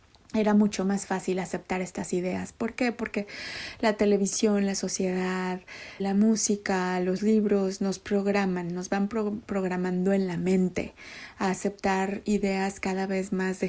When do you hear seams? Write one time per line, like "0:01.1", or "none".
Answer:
0:06.0